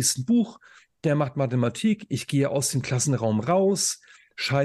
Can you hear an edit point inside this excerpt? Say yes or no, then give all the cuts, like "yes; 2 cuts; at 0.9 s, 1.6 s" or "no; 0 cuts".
no; 0 cuts